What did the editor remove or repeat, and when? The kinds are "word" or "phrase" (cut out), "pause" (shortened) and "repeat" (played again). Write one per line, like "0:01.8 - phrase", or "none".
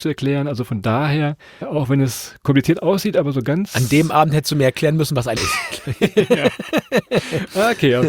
0:01.6 - word
0:05.4 - word